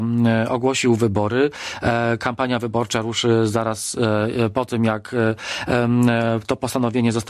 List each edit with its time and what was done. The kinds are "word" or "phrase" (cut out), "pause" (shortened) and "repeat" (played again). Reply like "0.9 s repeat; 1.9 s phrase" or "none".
none